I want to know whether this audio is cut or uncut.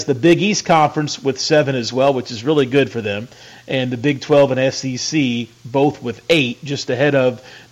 uncut